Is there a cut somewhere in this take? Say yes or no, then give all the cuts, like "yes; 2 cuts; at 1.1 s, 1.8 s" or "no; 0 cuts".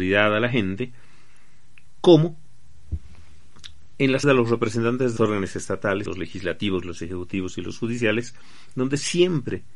yes; 3 cuts; at 4.2 s, 5.2 s, 6.1 s